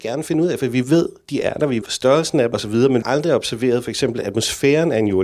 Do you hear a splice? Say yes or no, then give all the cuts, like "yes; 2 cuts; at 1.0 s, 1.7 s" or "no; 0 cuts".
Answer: yes; 3 cuts; at 1.8 s, 2.5 s, 3.0 s